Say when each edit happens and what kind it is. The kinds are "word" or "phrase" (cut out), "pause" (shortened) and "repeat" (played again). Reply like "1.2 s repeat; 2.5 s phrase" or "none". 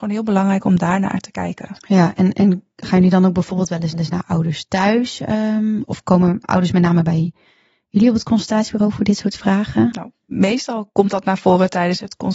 3.9 s repeat; 5.8 s word